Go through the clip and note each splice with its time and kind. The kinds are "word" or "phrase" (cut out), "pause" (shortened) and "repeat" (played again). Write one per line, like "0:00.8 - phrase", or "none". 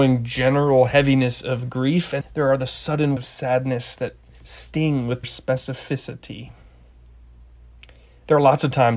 0:02.2 - word
0:03.2 - word
0:05.2 - word